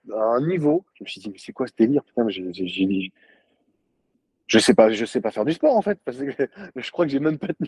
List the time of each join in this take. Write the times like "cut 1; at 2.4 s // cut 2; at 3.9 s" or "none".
cut 1; at 0.9 s